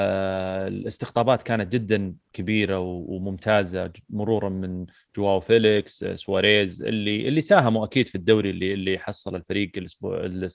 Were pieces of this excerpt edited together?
no; 0 cuts

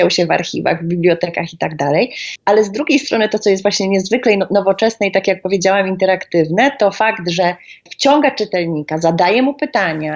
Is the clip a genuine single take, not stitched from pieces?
yes; 0 cuts

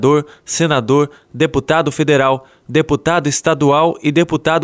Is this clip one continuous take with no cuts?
yes; 0 cuts

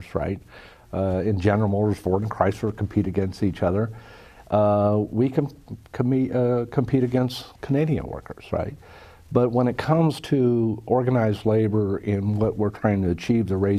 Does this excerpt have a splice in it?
no; 0 cuts

